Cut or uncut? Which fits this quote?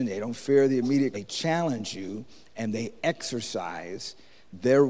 cut